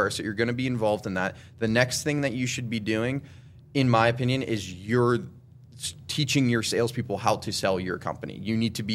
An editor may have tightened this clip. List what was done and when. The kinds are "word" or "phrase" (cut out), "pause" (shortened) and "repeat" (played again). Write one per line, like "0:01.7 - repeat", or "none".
none